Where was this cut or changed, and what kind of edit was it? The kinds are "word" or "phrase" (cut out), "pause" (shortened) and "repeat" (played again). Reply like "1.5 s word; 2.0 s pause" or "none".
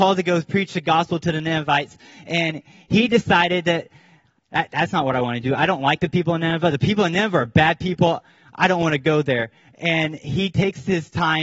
none

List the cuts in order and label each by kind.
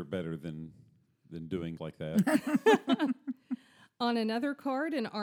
1.8 s word

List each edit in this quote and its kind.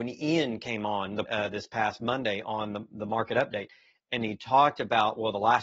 1.3 s word

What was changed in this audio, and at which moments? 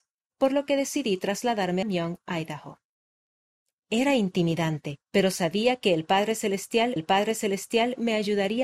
1.8 s phrase; 5.0 s pause; 7.0 s repeat

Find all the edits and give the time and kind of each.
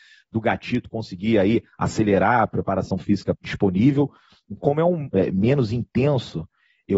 3.3 s phrase; 4.6 s word; 5.1 s phrase

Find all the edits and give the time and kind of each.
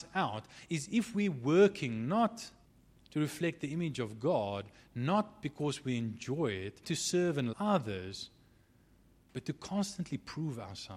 2.6 s pause; 6.8 s word; 7.5 s word

